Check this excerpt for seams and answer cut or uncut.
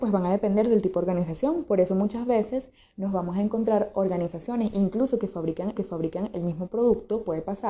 cut